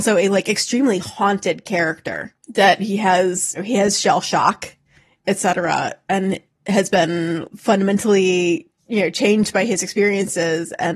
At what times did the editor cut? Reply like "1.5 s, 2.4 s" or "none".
2.4 s, 3.5 s, 7.5 s